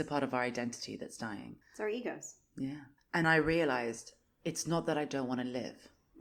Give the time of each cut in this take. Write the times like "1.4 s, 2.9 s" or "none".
1.6 s, 3.2 s